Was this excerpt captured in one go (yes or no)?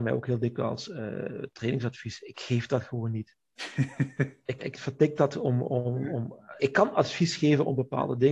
no